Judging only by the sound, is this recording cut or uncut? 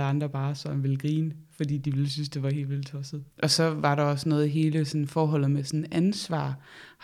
cut